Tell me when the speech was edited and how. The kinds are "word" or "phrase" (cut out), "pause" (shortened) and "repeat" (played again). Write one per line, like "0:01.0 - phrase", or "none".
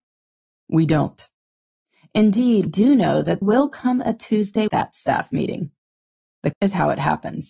0:02.7 - word
0:03.4 - word
0:04.7 - word
0:06.5 - word